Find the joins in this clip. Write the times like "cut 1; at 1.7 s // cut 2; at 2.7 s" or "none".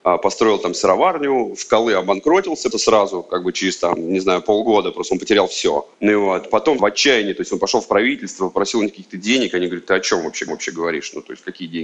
cut 1; at 2.7 s // cut 2; at 5.9 s // cut 3; at 6.8 s // cut 4; at 10.5 s